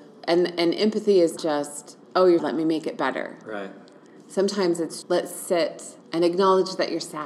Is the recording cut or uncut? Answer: cut